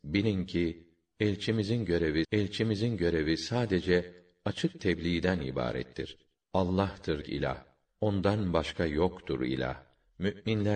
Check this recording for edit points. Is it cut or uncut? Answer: cut